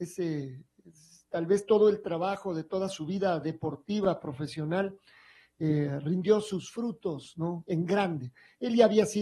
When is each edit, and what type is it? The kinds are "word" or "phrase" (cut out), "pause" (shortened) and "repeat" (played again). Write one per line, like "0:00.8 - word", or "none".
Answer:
none

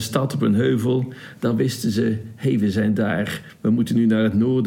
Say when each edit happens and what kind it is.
none

